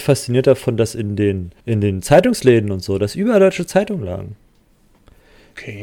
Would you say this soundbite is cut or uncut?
cut